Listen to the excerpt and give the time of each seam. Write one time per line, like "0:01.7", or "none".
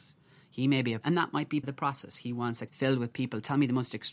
0:01.0
0:01.6
0:02.7